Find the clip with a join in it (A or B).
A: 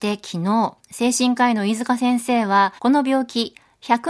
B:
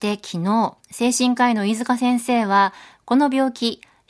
A